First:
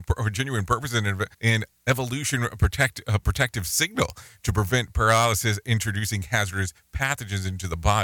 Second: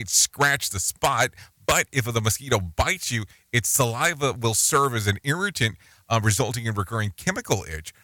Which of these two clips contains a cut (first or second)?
first